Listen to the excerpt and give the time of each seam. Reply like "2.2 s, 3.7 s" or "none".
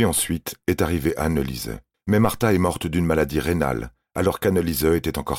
1.9 s